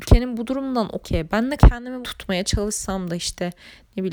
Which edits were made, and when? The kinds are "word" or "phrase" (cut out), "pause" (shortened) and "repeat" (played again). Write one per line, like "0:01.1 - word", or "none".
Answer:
0:01.0 - phrase
0:01.6 - word
0:02.0 - phrase